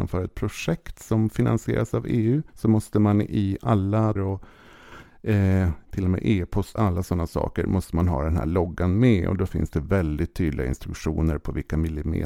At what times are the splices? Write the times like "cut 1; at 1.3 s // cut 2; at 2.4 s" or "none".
cut 1; at 2.5 s // cut 2; at 4.2 s // cut 3; at 5.8 s // cut 4; at 6.8 s